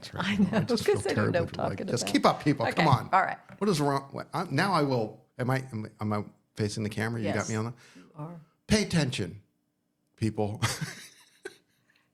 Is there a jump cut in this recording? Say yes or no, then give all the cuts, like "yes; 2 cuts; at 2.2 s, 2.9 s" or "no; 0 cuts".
yes; 1 cut; at 1.5 s